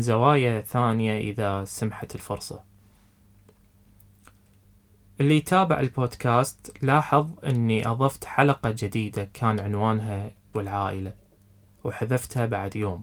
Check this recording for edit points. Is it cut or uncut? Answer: cut